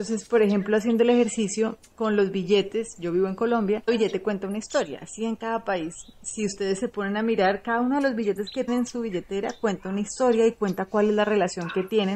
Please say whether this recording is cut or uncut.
cut